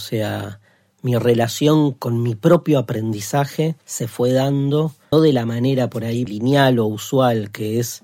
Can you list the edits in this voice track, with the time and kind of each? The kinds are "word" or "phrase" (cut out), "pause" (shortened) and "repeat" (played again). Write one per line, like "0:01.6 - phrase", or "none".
0:03.8 - pause
0:05.1 - word
0:06.3 - phrase